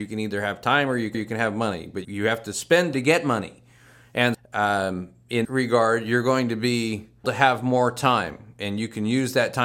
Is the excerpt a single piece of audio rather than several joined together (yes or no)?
no